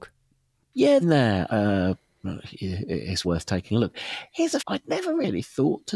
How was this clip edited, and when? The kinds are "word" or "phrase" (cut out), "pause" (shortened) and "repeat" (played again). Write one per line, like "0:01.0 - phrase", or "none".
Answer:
0:01.0 - phrase
0:01.5 - word
0:03.2 - word
0:04.6 - phrase